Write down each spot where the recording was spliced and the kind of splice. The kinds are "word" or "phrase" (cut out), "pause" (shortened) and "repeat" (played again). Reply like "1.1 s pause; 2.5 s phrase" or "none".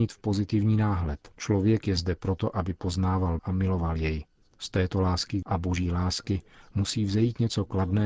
1.3 s pause; 3.4 s word; 4.4 s pause; 5.4 s word